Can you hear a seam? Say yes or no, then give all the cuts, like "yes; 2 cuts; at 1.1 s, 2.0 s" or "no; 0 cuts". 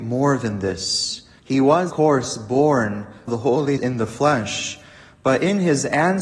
yes; 4 cuts; at 1.4 s, 1.9 s, 3.3 s, 3.8 s